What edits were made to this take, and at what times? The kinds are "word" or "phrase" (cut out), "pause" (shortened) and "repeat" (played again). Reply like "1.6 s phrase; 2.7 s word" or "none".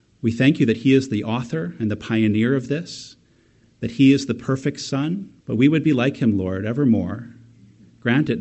5.4 s pause